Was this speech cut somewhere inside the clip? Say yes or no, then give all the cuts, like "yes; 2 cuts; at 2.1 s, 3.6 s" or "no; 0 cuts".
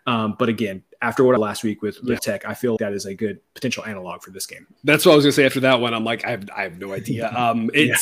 yes; 4 cuts; at 1.4 s, 2.2 s, 2.8 s, 4.8 s